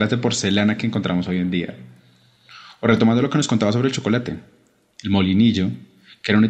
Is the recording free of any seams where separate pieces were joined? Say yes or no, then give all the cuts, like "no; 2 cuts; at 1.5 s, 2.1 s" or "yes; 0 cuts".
yes; 0 cuts